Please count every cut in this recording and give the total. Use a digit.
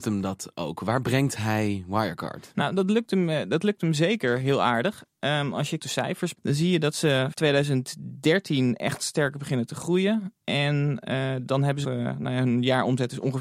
3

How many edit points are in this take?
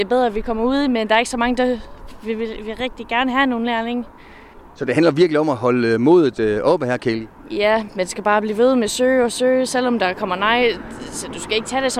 0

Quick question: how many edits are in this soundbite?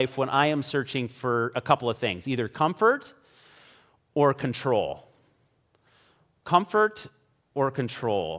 0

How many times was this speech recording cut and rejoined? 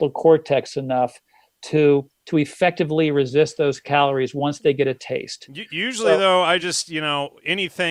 0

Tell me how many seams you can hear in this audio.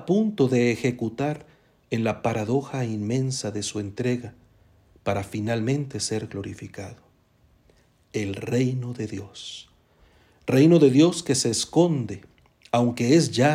0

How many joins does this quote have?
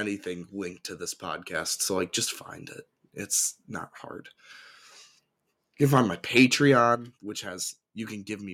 0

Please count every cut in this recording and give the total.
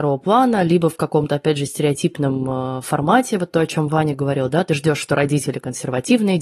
0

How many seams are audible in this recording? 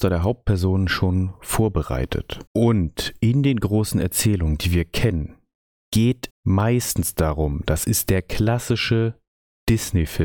2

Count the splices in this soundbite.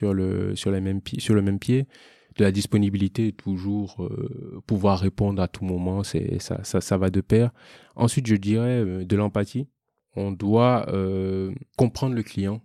0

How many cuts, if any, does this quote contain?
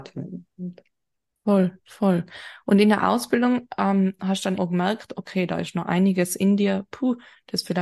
1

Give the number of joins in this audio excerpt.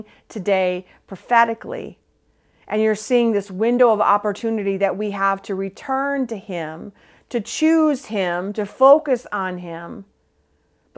0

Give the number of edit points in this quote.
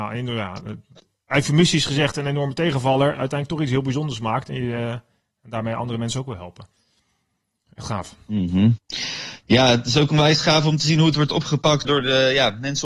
1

